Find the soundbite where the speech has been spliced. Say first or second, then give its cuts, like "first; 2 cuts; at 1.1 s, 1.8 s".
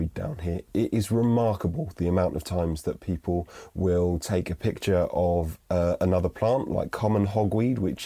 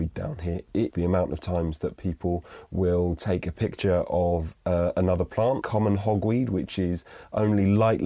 second; 2 cuts; at 0.9 s, 5.6 s